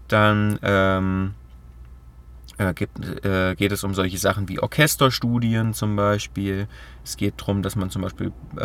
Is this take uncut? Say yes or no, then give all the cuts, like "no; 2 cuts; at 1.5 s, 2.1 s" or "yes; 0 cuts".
yes; 0 cuts